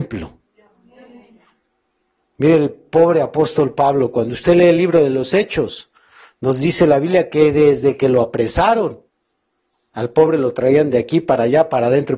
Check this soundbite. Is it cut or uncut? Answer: uncut